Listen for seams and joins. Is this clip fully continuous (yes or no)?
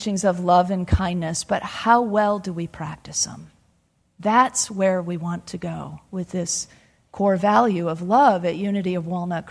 yes